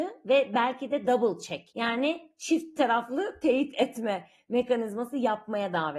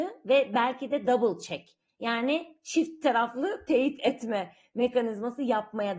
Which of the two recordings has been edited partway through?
first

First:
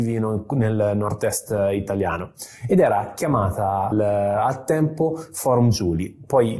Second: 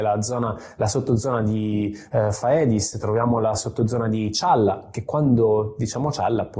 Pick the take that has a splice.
first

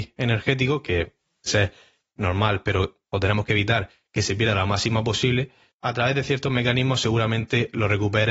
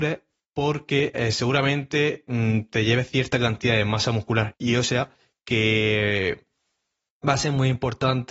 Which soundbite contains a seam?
first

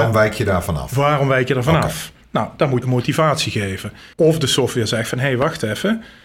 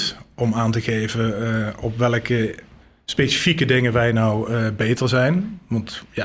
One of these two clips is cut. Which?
first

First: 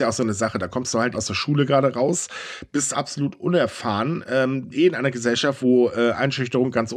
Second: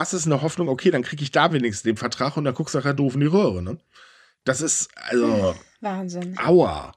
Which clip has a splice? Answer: first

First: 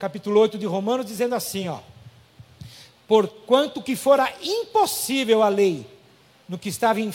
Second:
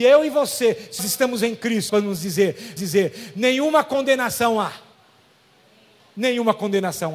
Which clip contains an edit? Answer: second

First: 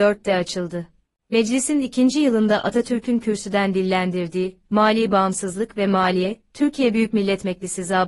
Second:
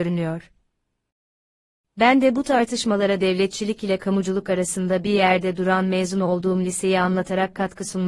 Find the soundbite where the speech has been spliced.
first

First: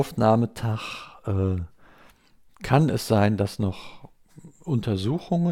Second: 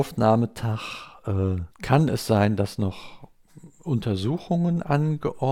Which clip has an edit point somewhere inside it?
second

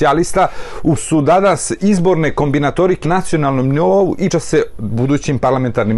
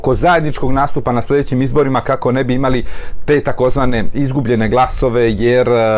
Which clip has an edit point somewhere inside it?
first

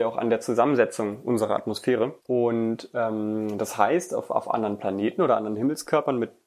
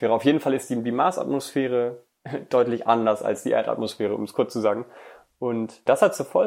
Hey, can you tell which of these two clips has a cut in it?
first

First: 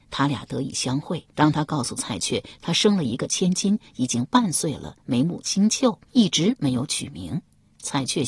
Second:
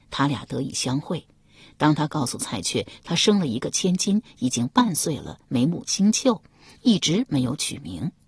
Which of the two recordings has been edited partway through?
first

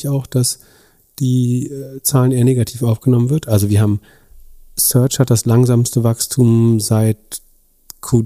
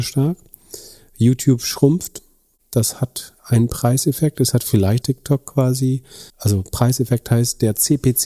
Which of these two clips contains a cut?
second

